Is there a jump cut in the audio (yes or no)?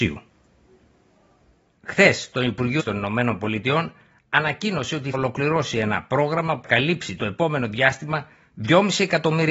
yes